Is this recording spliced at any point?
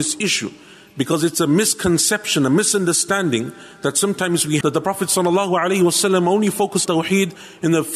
yes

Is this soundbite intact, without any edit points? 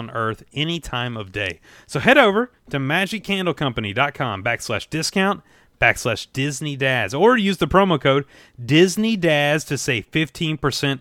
yes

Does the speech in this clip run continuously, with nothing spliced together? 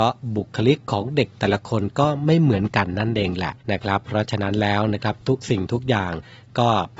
no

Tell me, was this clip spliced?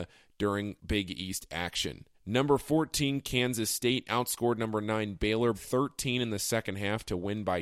yes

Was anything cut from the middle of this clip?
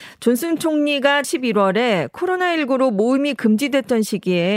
yes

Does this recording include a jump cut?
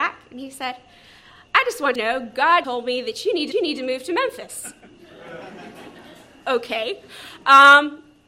yes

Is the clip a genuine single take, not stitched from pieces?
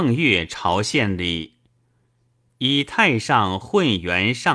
yes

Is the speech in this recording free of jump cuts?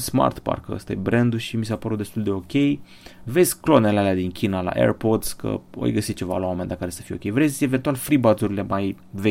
yes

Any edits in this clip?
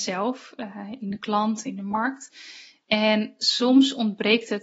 no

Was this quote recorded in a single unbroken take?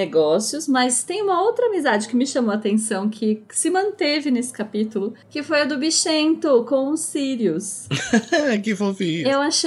yes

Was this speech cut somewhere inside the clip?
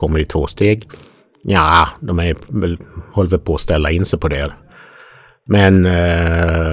no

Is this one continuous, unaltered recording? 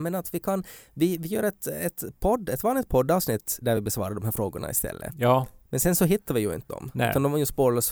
yes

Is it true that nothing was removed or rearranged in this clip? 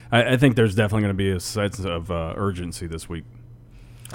yes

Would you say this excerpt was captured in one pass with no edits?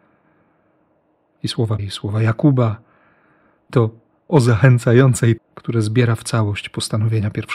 no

